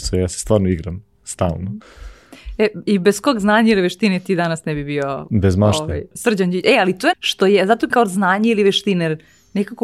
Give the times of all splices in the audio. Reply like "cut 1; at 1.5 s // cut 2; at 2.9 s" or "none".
cut 1; at 6.1 s // cut 2; at 7.1 s // cut 3; at 7.9 s